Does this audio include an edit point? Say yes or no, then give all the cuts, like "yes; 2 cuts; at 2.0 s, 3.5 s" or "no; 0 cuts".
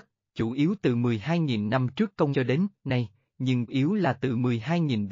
yes; 2 cuts; at 2.3 s, 3.7 s